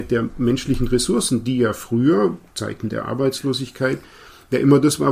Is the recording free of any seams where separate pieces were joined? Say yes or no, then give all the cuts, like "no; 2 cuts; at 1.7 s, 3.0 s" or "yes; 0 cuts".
no; 1 cut; at 2.5 s